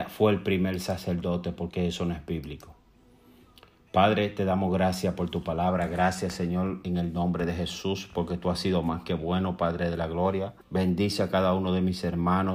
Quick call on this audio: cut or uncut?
cut